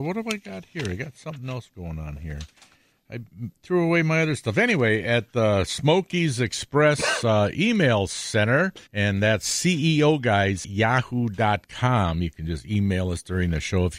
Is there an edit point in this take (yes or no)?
yes